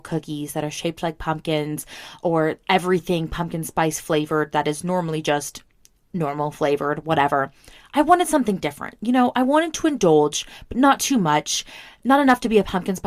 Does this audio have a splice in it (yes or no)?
no